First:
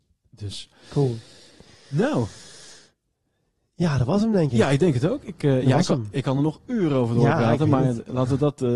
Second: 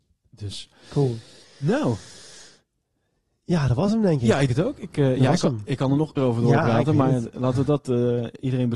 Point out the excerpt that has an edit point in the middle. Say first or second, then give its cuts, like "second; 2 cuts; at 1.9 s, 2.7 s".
second; 3 cuts; at 1.4 s, 4.5 s, 6.2 s